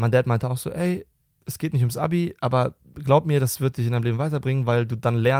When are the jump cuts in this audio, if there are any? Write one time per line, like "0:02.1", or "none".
none